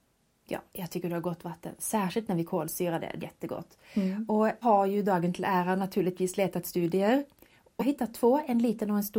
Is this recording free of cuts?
no; 3 cuts; at 3.2 s, 4.6 s, 7.8 s

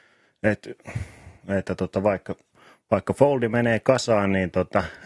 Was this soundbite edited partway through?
yes; 1 cut; at 1.4 s

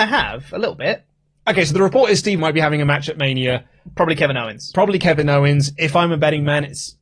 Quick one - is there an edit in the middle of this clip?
yes; 1 cut; at 2.4 s

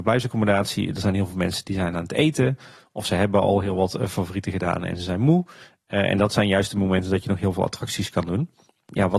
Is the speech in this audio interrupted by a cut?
no; 0 cuts

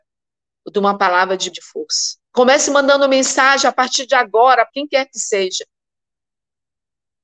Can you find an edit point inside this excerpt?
yes; 3 cuts; at 1.5 s, 2.2 s, 4.7 s

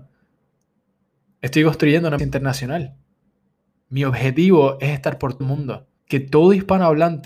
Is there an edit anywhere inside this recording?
yes; 3 cuts; at 2.2 s, 5.4 s, 6.0 s

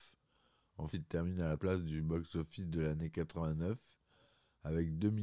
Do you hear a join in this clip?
yes; 2 cuts; at 0.9 s, 1.6 s

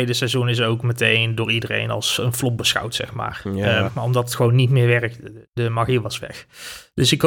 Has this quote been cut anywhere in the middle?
yes; 1 cut; at 3.8 s

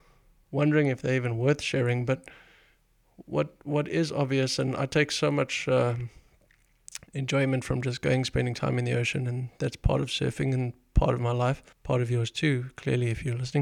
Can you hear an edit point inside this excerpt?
yes; 2 cuts; at 7.1 s, 11.7 s

